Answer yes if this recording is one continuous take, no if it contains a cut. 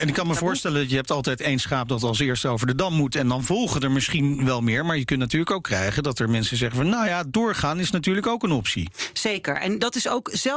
yes